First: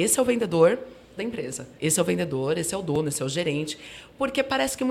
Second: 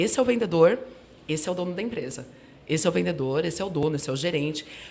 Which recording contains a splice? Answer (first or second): first